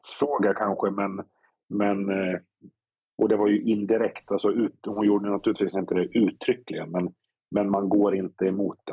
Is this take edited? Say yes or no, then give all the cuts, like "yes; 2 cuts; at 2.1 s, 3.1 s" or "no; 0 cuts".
no; 0 cuts